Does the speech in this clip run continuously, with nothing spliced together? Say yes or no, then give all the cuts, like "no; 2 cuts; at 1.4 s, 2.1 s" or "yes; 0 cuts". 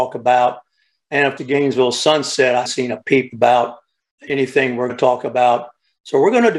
no; 4 cuts; at 1.4 s, 2.6 s, 4.2 s, 4.9 s